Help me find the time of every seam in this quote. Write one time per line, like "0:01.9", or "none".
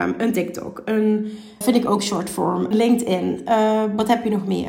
0:01.6
0:02.7